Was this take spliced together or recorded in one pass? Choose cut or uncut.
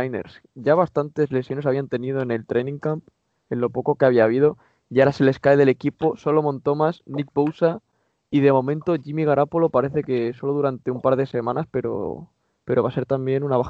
uncut